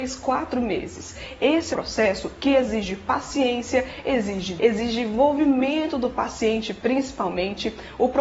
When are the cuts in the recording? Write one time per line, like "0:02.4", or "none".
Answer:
0:01.7
0:04.6